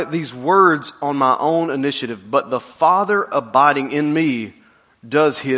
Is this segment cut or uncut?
uncut